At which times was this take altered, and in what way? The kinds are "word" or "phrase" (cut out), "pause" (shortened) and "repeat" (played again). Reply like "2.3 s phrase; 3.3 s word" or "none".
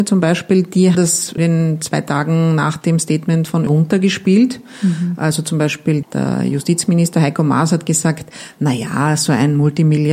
0.9 s word; 1.4 s word; 3.7 s word; 6.0 s word